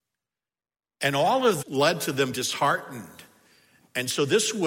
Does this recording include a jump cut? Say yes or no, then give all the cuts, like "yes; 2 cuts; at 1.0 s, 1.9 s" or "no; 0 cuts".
yes; 2 cuts; at 1.6 s, 2.3 s